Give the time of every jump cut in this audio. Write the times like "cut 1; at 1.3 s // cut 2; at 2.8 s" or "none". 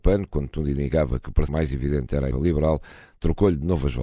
cut 1; at 1.5 s // cut 2; at 2.3 s